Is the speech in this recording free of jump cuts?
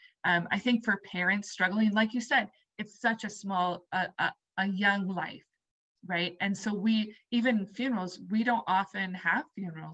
yes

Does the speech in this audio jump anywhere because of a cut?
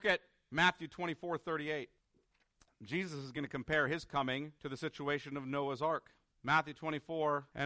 no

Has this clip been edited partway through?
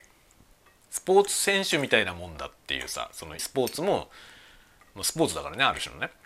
yes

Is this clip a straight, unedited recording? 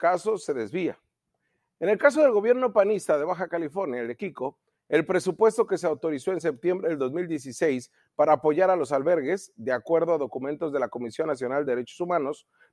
yes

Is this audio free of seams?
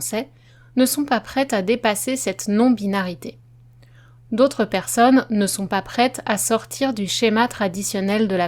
yes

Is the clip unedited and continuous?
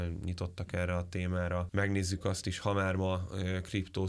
yes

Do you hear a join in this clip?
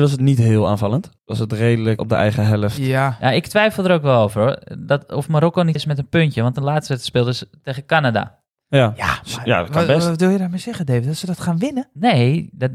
yes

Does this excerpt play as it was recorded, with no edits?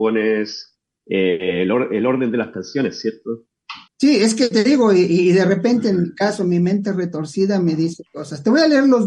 no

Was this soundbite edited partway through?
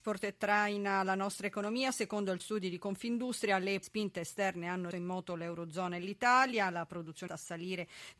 yes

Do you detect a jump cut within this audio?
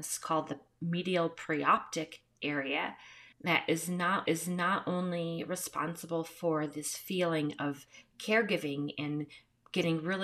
yes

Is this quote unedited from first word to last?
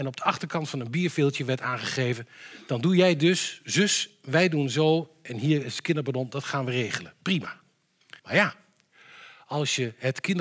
no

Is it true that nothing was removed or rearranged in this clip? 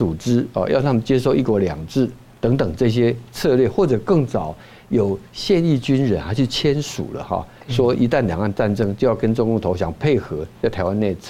yes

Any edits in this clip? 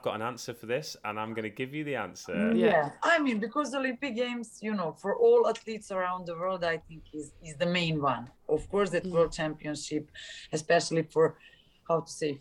yes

